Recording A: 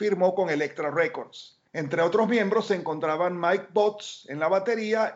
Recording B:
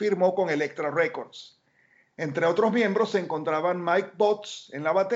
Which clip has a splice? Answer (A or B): A